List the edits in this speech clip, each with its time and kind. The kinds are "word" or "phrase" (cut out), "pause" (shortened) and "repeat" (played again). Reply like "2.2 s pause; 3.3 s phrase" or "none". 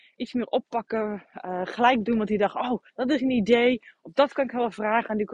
2.9 s pause